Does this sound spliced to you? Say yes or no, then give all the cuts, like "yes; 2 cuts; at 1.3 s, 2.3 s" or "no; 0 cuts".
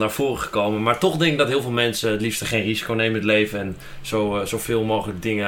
no; 0 cuts